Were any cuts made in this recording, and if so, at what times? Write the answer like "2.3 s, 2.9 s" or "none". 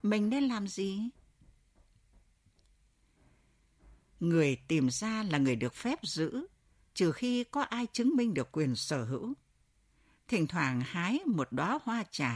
none